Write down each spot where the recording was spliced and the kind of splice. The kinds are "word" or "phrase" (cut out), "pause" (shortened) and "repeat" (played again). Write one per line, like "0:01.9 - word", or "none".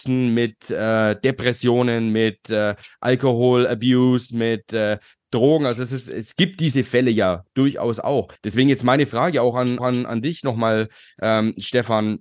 0:08.4 - pause
0:09.8 - repeat